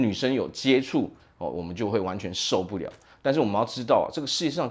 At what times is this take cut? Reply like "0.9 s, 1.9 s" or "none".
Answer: none